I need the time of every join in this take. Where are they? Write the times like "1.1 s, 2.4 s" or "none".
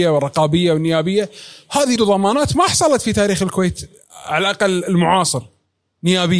2.0 s